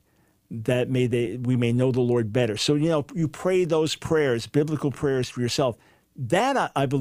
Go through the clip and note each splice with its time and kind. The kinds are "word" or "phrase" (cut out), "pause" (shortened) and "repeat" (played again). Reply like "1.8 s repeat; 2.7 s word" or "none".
none